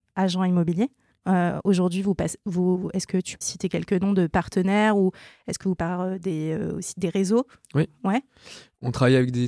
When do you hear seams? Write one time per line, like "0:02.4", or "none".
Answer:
0:01.1
0:03.4
0:05.8

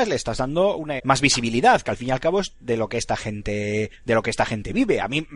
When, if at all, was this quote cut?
0:01.0
0:03.9

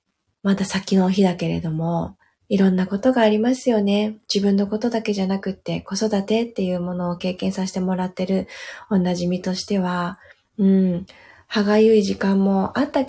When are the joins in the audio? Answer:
0:02.2

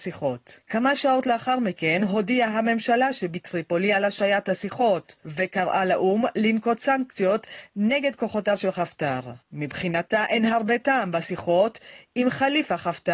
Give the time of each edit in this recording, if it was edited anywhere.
0:09.4

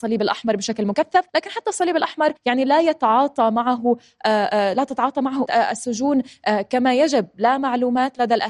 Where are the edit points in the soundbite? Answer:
0:01.3
0:02.4
0:05.5

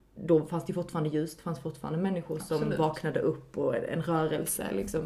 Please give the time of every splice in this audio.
none

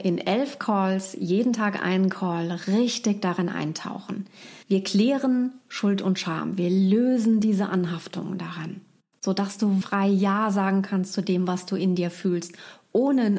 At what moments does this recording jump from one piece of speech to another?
0:04.6
0:09.8

